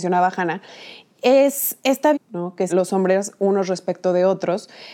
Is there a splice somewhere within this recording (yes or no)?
yes